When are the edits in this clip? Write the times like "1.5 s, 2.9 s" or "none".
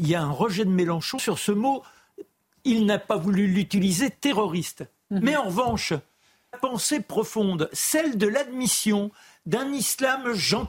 1.2 s, 6.5 s